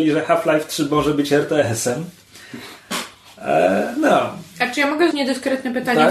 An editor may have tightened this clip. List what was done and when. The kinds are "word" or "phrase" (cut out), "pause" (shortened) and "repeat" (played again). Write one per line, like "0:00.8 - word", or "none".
0:05.1 - word